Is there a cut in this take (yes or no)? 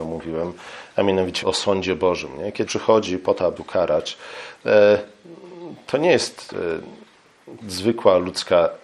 yes